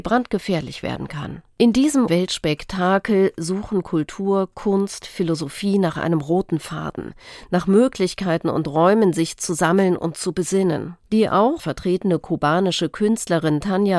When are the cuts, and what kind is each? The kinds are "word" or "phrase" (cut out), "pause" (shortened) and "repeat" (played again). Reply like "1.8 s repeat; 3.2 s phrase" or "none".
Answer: 1.5 s pause; 2.1 s word; 11.0 s pause; 11.6 s phrase